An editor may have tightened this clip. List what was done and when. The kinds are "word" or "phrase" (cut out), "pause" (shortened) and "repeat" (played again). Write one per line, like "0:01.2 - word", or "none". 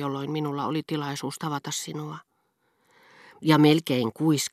none